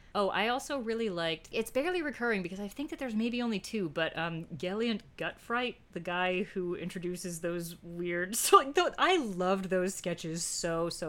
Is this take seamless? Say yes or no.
yes